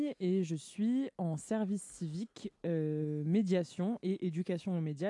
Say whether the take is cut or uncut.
uncut